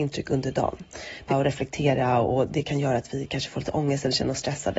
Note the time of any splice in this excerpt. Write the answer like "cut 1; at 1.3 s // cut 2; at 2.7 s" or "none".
cut 1; at 1.3 s